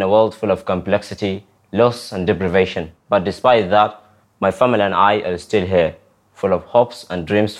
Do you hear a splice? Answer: yes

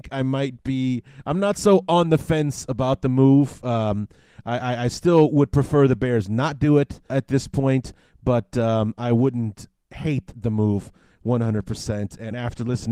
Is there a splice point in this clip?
yes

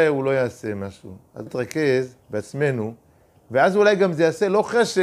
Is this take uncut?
no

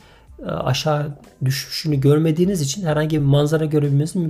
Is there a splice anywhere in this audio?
no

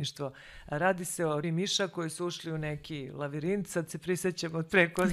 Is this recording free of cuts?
no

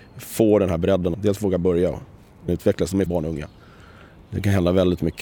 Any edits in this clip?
yes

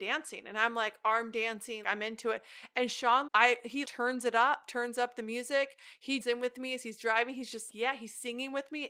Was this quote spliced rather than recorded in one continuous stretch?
yes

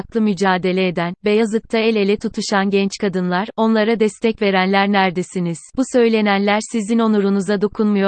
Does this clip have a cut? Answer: yes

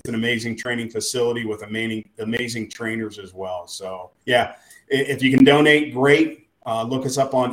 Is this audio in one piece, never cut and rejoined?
no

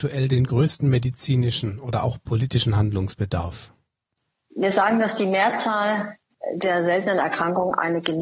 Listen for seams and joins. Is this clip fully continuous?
yes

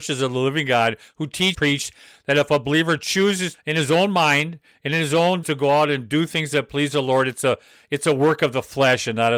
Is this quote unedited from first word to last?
no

